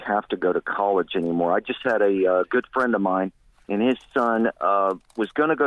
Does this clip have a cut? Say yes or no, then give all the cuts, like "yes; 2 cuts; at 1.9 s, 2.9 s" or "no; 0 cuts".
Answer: no; 0 cuts